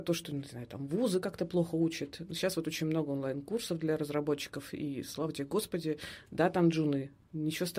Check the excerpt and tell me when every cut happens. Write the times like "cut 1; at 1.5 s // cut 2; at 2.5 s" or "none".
none

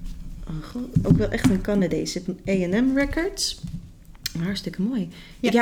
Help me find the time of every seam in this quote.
cut 1; at 1.0 s // cut 2; at 2.3 s

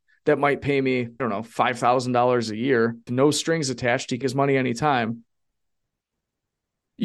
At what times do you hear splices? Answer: cut 1; at 1.2 s // cut 2; at 3.1 s // cut 3; at 4.2 s

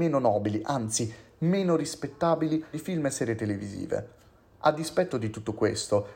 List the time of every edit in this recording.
cut 1; at 2.7 s

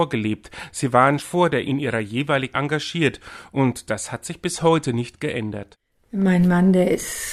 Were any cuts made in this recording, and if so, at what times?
cut 1; at 1.2 s // cut 2; at 1.7 s // cut 3; at 2.5 s

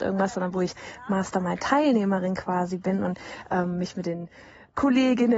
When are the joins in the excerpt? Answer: none

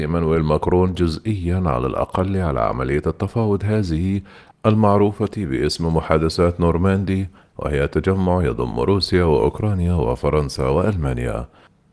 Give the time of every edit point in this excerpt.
none

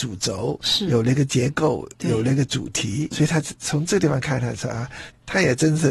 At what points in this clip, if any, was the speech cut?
cut 1; at 3.1 s

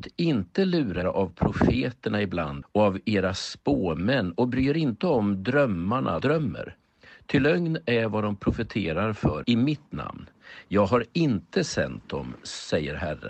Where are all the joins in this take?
cut 1; at 1.0 s // cut 2; at 2.6 s // cut 3; at 6.2 s // cut 4; at 9.4 s

